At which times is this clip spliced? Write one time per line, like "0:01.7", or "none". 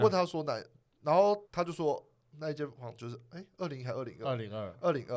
0:01.4

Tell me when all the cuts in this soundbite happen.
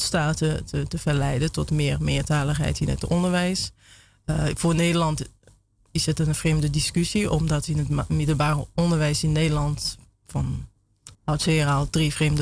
0:11.1

